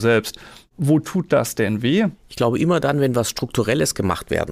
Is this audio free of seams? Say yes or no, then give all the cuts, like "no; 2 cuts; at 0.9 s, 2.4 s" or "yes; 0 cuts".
yes; 0 cuts